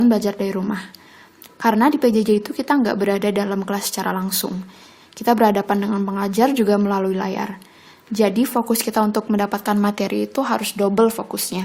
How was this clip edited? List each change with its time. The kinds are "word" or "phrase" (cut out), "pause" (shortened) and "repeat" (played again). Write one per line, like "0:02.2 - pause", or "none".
none